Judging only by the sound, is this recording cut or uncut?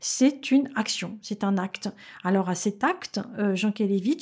uncut